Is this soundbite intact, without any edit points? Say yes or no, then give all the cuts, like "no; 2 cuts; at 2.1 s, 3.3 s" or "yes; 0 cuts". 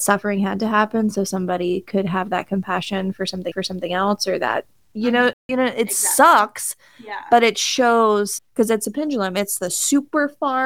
no; 2 cuts; at 3.5 s, 8.4 s